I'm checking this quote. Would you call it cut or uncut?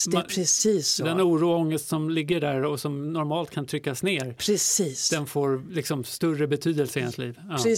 uncut